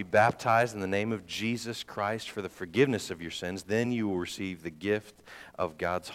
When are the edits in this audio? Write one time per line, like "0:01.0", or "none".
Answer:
none